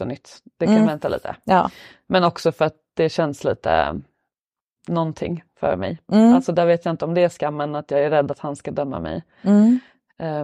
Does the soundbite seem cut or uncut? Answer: uncut